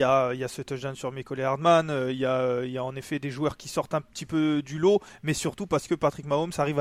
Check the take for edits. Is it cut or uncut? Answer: uncut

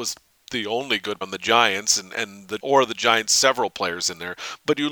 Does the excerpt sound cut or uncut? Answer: cut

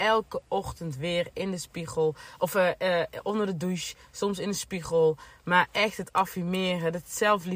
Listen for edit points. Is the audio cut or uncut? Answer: uncut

